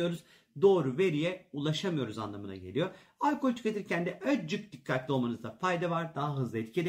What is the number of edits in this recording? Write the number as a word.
zero